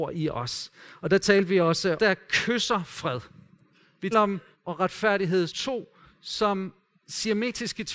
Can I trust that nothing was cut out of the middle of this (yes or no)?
no